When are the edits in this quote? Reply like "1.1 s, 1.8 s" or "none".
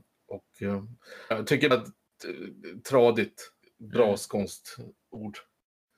1.3 s, 1.7 s, 3.6 s